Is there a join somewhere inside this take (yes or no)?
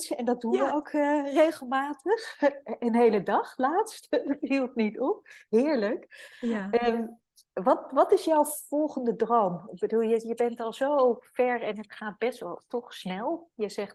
no